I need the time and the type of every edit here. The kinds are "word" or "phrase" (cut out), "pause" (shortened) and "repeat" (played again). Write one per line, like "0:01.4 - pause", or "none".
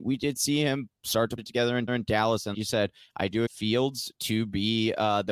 0:01.4 - word
0:01.9 - repeat
0:02.5 - word
0:03.5 - word